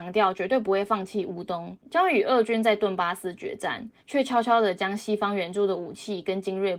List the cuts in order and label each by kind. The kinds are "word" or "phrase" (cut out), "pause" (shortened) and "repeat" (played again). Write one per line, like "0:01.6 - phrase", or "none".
0:01.8 - pause
0:04.0 - pause